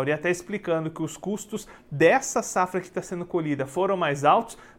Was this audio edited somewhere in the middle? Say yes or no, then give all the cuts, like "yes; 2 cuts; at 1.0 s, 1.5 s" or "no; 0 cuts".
no; 0 cuts